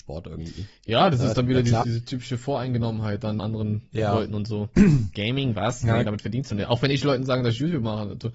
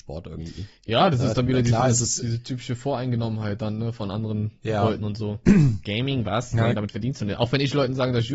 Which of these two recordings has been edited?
first; 2 cuts; at 1.8 s, 3.4 s

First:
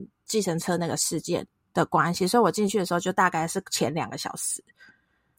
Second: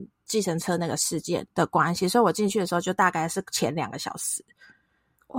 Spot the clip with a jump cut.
second; 1 cut; at 1.5 s

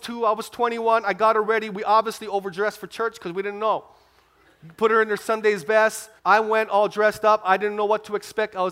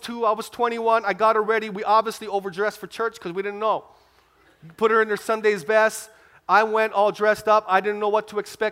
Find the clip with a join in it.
first; 1 cut; at 6.2 s

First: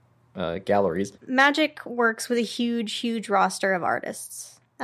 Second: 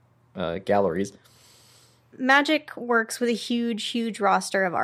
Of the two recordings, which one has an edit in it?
first; 1 cut; at 1.2 s

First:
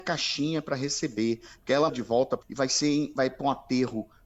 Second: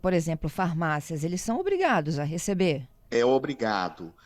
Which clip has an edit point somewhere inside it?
first; 2 cuts; at 1.9 s, 2.4 s

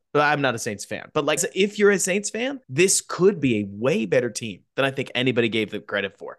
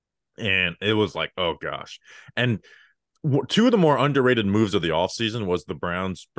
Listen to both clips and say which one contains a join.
first; 3 cuts; at 1.4 s, 2.6 s, 4.7 s

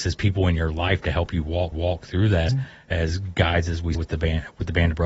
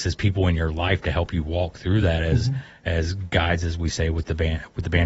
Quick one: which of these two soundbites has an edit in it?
first; 3 cuts; at 1.7 s, 2.5 s, 3.9 s

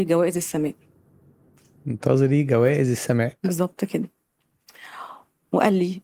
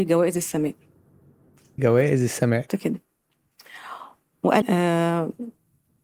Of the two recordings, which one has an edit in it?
second; 3 cuts; at 1.8 s, 2.7 s, 4.6 s

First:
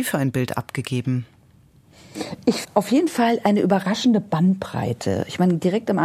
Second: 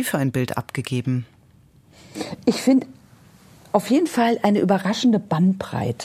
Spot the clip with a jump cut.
first; 1 cut; at 2.6 s

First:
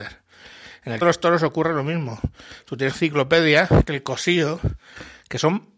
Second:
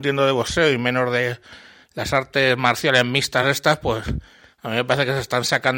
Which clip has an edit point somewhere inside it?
first; 3 cuts; at 1.0 s, 2.9 s, 3.9 s

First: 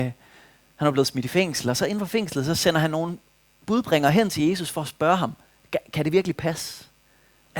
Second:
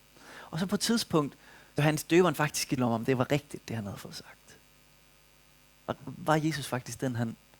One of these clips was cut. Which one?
second; 3 cuts; at 1.8 s, 2.8 s, 6.0 s

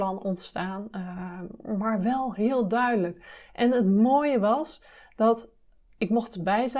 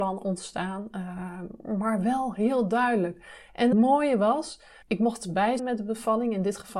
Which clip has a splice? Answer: second; 3 cuts; at 3.7 s, 4.8 s, 5.6 s

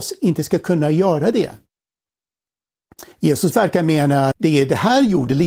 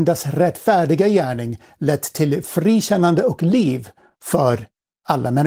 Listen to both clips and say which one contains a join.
first; 2 cuts; at 3.1 s, 4.3 s

